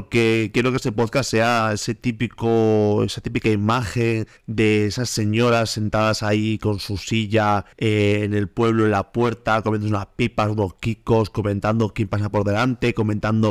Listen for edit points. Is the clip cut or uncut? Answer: cut